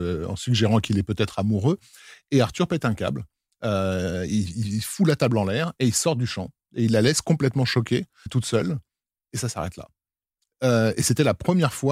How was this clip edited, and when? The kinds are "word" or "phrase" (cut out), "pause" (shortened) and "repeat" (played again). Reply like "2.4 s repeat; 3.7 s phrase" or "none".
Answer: 8.3 s word